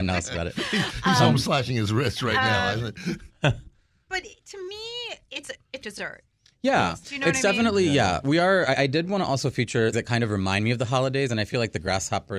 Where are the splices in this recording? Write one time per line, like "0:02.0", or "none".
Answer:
0:05.8
0:09.9